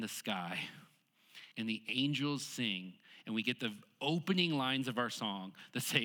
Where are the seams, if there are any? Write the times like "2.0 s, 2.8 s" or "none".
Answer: 1.5 s